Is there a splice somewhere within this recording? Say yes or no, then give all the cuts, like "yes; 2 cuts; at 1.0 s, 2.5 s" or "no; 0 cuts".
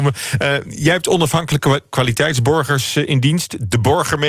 no; 0 cuts